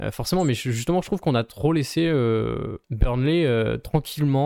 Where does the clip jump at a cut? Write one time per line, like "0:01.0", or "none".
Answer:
0:02.8